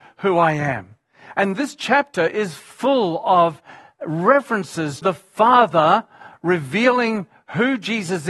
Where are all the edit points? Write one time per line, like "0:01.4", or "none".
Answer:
0:05.0